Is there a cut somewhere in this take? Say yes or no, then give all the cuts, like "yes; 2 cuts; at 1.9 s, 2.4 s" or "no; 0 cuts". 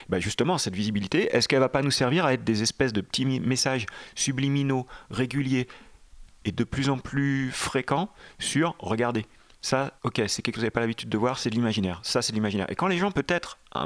yes; 2 cuts; at 10.0 s, 10.5 s